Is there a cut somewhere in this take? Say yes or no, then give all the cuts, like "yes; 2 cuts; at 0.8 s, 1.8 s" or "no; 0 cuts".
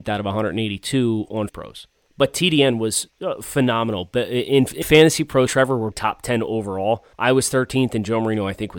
yes; 6 cuts; at 1.5 s, 2.1 s, 4.8 s, 5.5 s, 5.9 s, 7.1 s